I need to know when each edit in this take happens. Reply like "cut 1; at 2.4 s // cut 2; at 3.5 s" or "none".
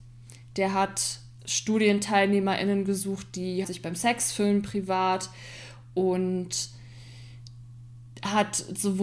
cut 1; at 1.4 s // cut 2; at 3.6 s